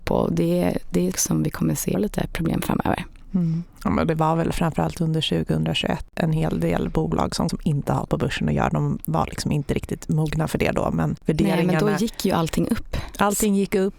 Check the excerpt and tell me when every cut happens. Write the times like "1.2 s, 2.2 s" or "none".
1.1 s, 1.9 s, 7.5 s